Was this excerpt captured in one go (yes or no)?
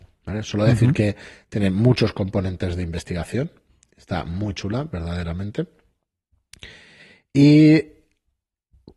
yes